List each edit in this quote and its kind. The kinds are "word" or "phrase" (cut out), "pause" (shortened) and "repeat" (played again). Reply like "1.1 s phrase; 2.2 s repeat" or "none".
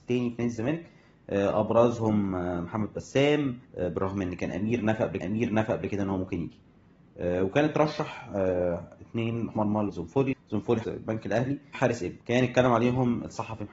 3.6 s pause; 5.2 s repeat; 9.5 s word; 9.9 s word; 10.3 s word; 10.8 s word; 11.7 s word; 12.2 s pause